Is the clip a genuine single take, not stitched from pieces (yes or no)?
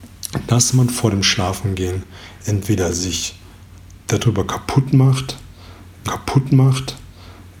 no